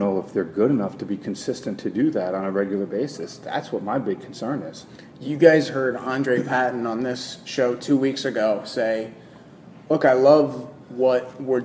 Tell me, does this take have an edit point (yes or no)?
no